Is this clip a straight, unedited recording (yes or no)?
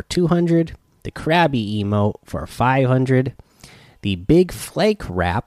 yes